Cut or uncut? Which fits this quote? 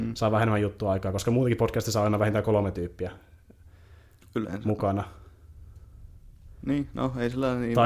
uncut